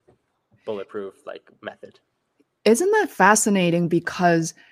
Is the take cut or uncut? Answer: uncut